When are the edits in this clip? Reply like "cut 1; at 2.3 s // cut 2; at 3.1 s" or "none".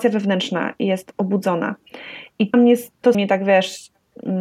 cut 1; at 2.5 s // cut 2; at 3.1 s